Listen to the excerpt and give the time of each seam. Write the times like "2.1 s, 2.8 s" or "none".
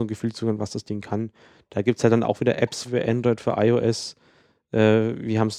2.8 s